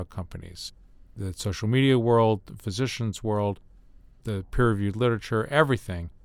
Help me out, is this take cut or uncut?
uncut